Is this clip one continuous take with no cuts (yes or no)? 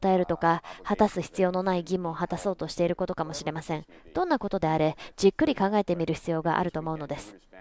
yes